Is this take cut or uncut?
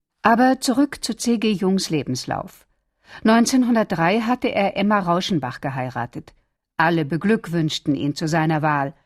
uncut